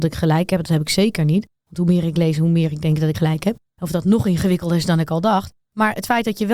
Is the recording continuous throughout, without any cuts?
no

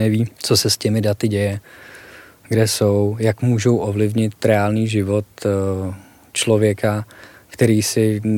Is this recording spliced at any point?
no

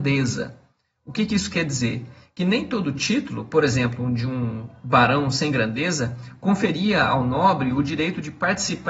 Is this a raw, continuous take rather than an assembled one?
yes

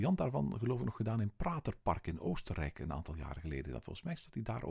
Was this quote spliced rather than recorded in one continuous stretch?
no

